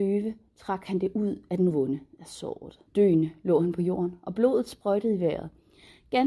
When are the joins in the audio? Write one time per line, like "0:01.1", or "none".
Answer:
0:01.7
0:02.9